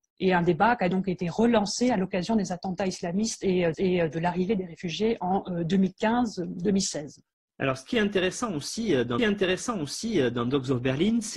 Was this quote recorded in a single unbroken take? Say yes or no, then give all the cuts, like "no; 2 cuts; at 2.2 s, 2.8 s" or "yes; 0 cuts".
no; 3 cuts; at 3.7 s, 7.5 s, 9.2 s